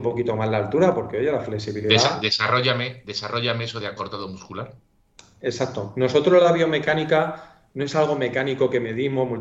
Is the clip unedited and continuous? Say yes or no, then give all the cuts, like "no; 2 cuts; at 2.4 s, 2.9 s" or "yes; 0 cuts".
yes; 0 cuts